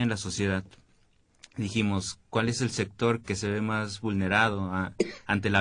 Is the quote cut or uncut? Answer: cut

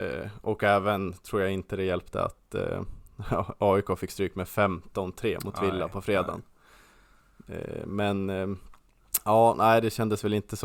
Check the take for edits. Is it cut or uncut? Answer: uncut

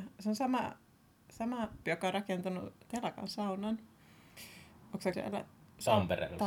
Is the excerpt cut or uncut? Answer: cut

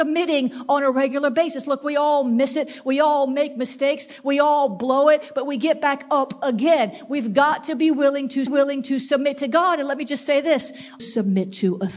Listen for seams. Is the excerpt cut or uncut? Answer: cut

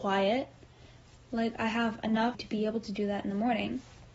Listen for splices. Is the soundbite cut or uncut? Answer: cut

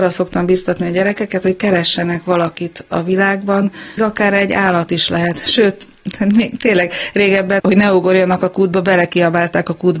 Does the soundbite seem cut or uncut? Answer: cut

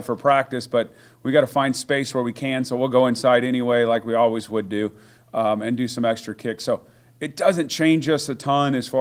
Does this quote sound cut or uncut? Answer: uncut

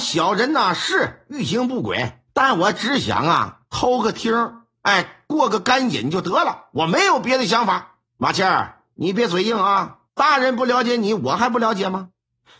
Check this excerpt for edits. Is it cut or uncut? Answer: cut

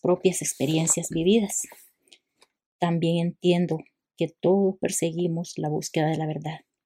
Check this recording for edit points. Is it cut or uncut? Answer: uncut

